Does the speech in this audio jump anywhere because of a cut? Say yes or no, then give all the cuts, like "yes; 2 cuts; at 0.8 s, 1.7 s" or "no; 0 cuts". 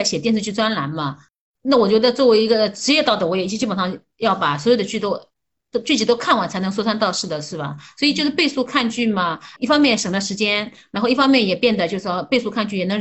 yes; 1 cut; at 9.6 s